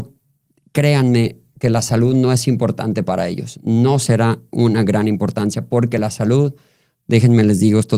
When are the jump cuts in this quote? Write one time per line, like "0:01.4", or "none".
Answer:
none